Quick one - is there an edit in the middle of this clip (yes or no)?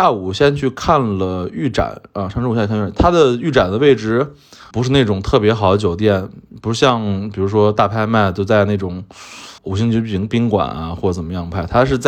yes